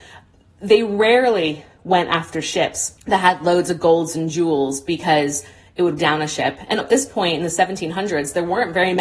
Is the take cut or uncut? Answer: cut